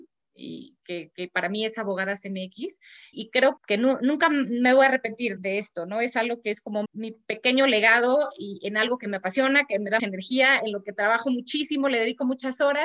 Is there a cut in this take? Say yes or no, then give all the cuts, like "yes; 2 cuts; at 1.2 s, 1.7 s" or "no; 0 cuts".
yes; 5 cuts; at 3.1 s, 3.6 s, 5.4 s, 6.8 s, 10.0 s